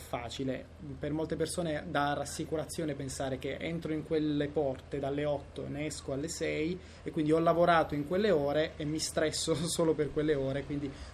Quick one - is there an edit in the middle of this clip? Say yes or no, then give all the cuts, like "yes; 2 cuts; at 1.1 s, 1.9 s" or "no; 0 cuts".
no; 0 cuts